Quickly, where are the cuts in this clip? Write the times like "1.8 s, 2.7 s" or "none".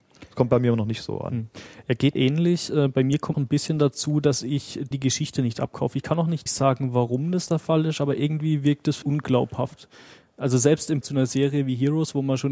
2.2 s, 3.3 s, 4.9 s, 6.5 s, 9.0 s, 11.0 s